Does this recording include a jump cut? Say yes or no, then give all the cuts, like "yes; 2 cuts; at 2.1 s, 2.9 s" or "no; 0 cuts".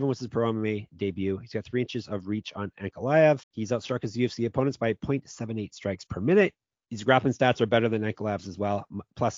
yes; 1 cut; at 3.4 s